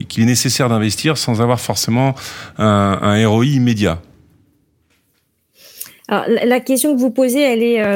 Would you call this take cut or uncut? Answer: uncut